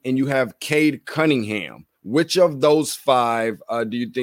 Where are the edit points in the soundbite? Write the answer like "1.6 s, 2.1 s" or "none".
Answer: 2.0 s